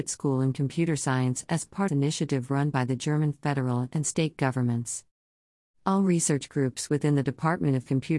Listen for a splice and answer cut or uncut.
cut